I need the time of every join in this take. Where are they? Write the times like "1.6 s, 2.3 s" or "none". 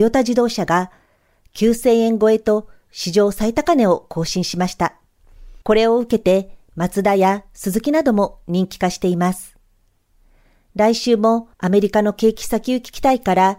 5.6 s, 11.5 s